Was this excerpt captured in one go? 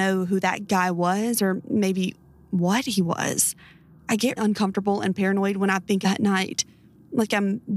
no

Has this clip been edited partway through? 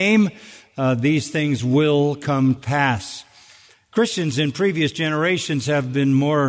yes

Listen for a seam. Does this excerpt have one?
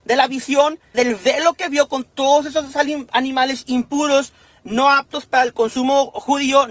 yes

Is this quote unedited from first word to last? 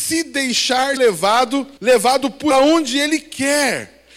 no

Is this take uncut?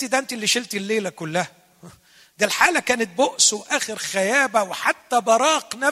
yes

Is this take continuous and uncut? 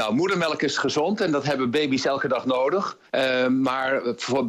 no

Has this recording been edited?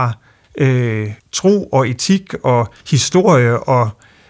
yes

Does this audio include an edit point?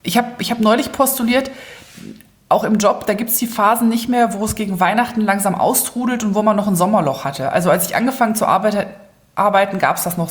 no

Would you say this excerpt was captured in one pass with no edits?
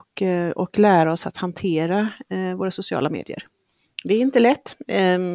yes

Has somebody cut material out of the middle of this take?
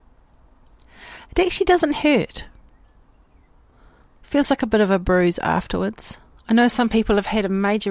no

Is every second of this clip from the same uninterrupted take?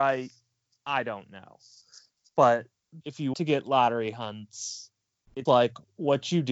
no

